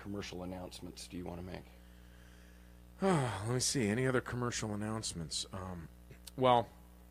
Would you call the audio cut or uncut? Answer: uncut